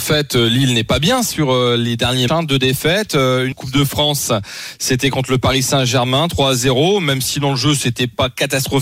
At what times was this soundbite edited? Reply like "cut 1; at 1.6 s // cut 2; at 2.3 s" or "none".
cut 1; at 2.3 s // cut 2; at 3.5 s